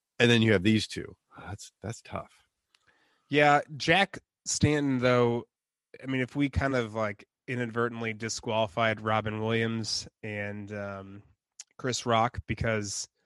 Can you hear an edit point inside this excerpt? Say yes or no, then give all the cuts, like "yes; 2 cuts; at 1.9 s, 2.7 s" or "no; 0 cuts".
no; 0 cuts